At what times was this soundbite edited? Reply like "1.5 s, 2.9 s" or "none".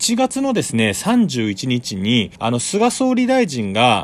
2.4 s